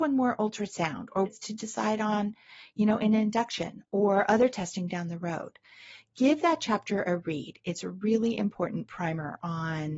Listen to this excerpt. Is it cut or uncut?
cut